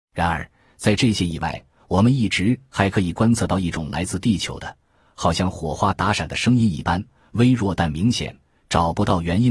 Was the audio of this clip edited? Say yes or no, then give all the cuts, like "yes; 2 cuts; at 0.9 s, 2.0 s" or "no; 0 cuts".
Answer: no; 0 cuts